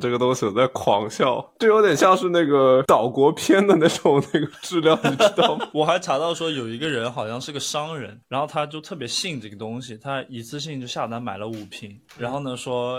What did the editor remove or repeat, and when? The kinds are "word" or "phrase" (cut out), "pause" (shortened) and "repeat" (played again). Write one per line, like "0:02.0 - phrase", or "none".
0:12.0 - pause